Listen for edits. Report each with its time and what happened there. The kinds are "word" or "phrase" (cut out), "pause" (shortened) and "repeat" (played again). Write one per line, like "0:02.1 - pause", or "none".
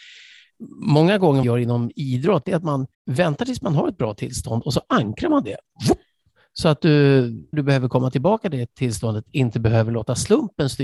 0:01.4 - phrase
0:02.9 - pause
0:07.5 - word